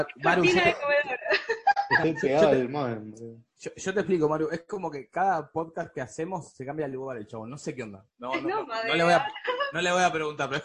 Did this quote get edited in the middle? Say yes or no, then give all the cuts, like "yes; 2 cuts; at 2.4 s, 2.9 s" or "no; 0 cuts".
no; 0 cuts